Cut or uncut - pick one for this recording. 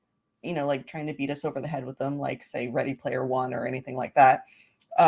uncut